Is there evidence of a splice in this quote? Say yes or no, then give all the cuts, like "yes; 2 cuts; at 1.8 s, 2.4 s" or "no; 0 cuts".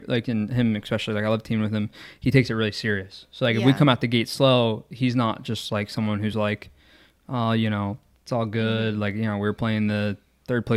no; 0 cuts